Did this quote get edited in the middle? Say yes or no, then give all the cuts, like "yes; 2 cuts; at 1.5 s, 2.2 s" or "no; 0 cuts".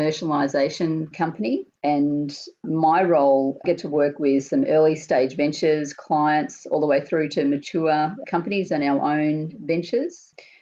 yes; 2 cuts; at 1.8 s, 3.6 s